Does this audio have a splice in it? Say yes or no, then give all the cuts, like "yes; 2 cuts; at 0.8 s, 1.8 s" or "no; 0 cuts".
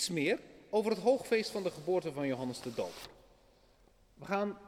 no; 0 cuts